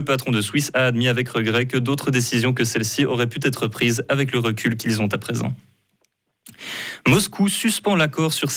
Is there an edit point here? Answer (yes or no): no